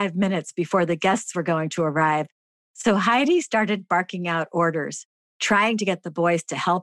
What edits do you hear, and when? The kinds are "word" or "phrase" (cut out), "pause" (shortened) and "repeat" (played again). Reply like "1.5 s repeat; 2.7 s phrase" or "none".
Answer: none